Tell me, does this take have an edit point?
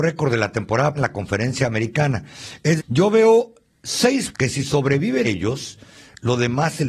yes; 4 cuts; at 1.0 s, 2.8 s, 4.3 s, 5.2 s

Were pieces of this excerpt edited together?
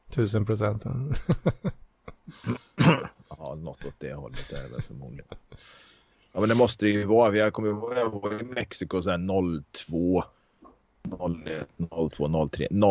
no; 0 cuts

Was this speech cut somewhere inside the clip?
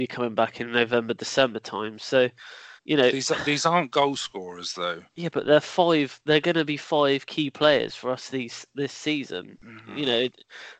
yes; 2 cuts; at 2.8 s, 5.1 s

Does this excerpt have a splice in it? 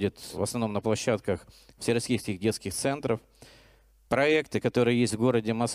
no; 0 cuts

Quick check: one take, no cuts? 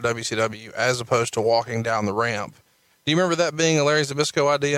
yes; 0 cuts

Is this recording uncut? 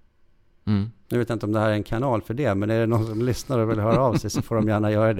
no; 1 cut; at 1.0 s

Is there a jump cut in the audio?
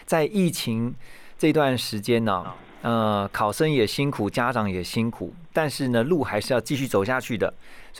no; 0 cuts

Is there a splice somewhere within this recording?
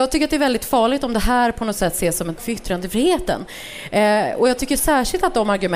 yes; 1 cut; at 2.4 s

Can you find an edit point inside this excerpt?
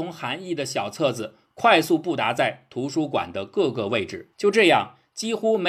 yes; 1 cut; at 4.3 s

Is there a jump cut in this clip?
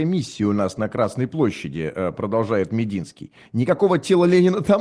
no; 0 cuts

